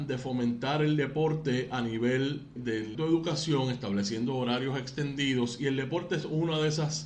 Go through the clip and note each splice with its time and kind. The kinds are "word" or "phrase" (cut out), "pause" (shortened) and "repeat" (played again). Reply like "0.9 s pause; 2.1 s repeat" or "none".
2.6 s word; 2.9 s word